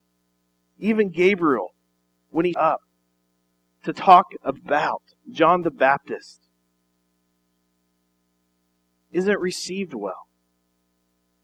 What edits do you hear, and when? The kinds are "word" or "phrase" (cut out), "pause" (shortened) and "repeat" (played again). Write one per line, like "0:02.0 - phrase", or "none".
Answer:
0:02.5 - word